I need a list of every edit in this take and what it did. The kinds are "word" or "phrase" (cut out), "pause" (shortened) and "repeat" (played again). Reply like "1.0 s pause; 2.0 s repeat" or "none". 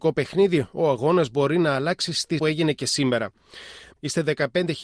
2.4 s phrase